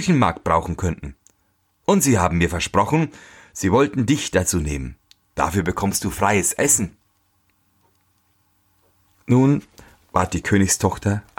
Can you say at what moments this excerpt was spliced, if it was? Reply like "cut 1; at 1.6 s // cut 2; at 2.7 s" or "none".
none